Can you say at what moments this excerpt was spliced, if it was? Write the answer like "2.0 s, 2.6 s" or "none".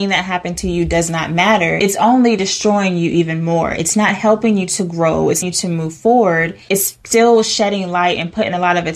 5.4 s, 6.6 s